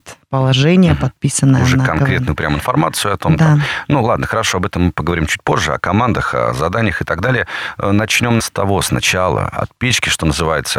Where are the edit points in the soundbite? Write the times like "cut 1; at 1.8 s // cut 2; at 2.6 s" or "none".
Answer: cut 1; at 8.4 s